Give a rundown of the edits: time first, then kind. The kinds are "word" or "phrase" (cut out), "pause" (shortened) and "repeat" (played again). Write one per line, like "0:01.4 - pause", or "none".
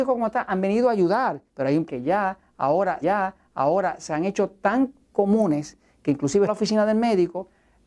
0:01.5 - pause
0:01.9 - word
0:03.0 - repeat
0:06.5 - phrase